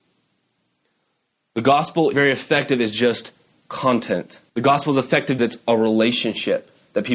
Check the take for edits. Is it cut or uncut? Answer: cut